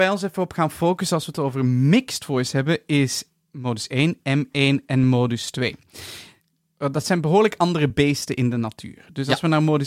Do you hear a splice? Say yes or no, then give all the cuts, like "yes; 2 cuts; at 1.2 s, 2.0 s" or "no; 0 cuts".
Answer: no; 0 cuts